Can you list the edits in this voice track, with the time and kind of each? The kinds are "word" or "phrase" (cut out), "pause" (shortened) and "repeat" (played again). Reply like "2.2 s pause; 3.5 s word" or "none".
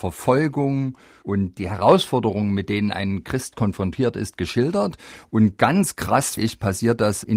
6.4 s word